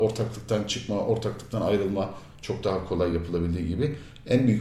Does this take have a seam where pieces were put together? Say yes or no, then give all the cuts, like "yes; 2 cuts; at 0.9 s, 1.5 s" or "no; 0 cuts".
no; 0 cuts